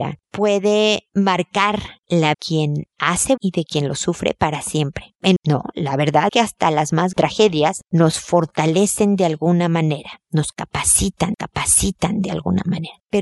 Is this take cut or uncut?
cut